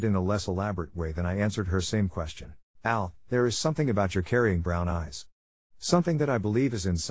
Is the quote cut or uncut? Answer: cut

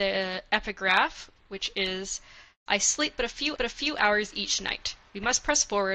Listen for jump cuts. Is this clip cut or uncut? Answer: cut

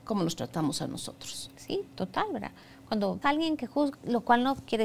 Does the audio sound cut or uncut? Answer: cut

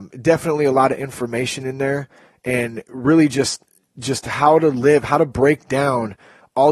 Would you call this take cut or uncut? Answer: uncut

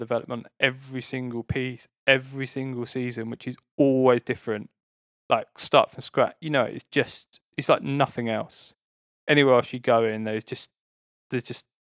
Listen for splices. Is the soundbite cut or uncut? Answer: uncut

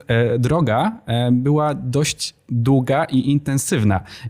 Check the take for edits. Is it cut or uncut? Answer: uncut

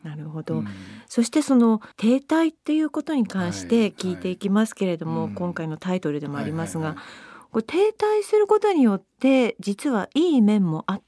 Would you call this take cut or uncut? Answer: cut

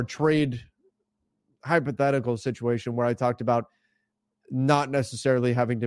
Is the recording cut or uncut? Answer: uncut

